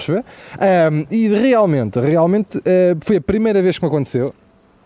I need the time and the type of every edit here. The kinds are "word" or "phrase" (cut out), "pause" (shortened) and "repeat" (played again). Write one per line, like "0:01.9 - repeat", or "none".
none